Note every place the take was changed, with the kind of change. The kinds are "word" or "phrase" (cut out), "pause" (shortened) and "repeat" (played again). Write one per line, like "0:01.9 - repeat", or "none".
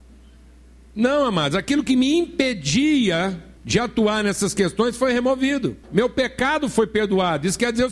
0:03.6 - pause
0:05.8 - pause